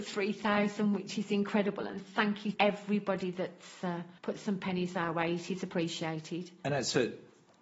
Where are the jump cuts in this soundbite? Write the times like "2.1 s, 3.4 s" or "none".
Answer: 2.5 s, 4.2 s